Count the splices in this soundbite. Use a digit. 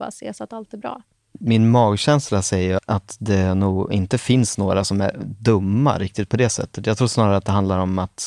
0